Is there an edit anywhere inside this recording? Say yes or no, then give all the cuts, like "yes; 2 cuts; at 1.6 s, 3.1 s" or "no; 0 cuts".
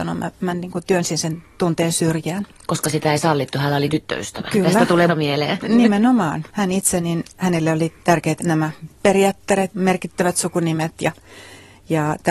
yes; 4 cuts; at 3.9 s, 5.1 s, 8.4 s, 9.7 s